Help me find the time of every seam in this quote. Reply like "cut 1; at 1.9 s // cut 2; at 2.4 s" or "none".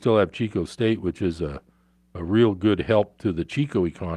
none